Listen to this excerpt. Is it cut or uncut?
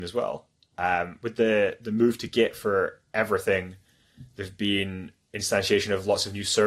uncut